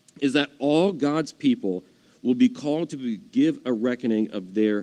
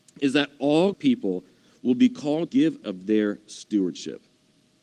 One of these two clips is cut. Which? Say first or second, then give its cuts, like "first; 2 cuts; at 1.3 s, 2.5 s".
second; 3 cuts; at 0.9 s, 2.5 s, 2.8 s